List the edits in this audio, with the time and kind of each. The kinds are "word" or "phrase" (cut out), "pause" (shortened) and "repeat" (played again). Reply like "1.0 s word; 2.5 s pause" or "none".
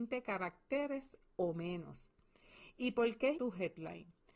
3.3 s word